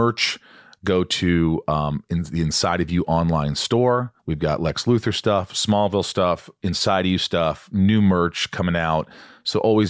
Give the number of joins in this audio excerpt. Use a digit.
1